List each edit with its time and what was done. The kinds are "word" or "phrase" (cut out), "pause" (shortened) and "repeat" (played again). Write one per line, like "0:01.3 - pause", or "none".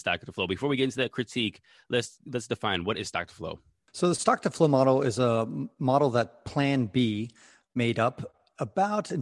none

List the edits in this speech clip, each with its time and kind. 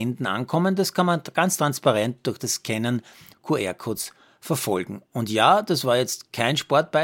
0:03.3 - word

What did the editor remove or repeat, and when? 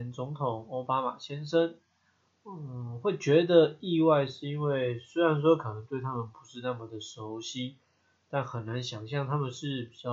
none

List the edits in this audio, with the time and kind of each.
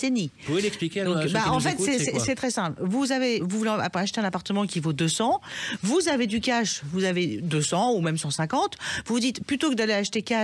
0:02.4 - word
0:03.4 - word

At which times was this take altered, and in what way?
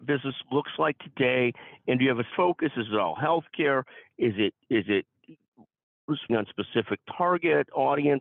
0:02.3 - word
0:06.3 - word

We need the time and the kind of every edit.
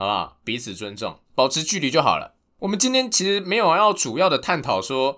0:01.2 - pause

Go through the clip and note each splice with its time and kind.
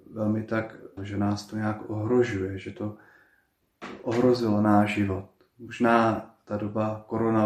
0:01.0 - phrase

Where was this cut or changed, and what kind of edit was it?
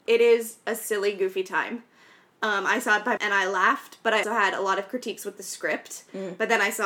0:03.2 - word
0:04.2 - word

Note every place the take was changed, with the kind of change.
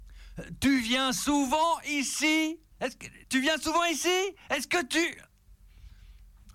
0:02.7 - pause
0:03.2 - pause

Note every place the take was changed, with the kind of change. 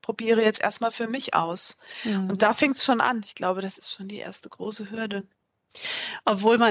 none

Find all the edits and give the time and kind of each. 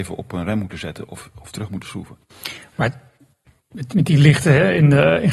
none

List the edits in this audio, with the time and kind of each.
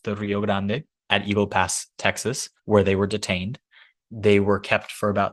0:02.6 - pause

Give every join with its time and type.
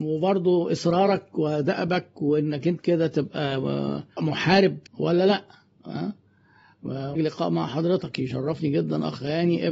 0:02.8 - word
0:04.9 - pause
0:07.2 - word

